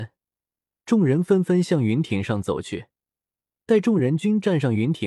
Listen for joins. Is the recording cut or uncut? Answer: uncut